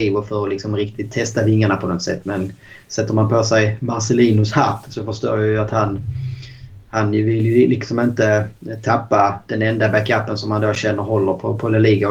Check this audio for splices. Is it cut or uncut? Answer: uncut